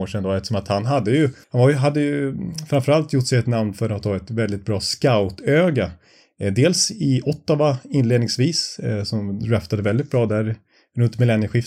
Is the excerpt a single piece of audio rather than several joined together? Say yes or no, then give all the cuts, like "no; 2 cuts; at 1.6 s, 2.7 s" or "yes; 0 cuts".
no; 1 cut; at 1.4 s